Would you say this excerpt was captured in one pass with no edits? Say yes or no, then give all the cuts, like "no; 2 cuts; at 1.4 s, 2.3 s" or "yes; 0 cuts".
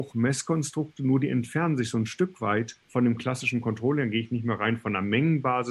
no; 1 cut; at 2.8 s